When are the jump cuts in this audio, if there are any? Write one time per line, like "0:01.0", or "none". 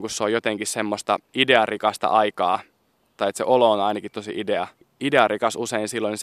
0:01.2